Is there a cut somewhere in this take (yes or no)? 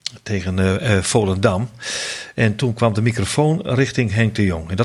no